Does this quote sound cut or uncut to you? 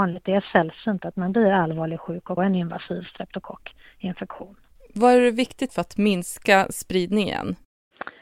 cut